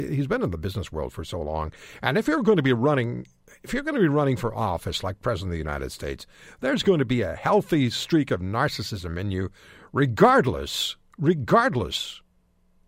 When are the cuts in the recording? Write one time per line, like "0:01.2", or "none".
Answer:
none